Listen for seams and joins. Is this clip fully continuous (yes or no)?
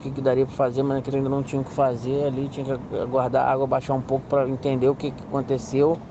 no